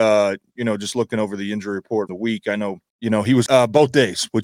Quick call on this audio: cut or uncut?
cut